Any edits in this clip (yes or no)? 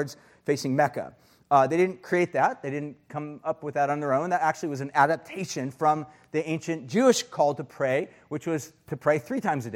no